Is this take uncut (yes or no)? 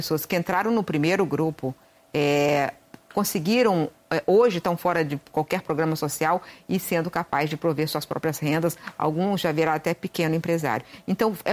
yes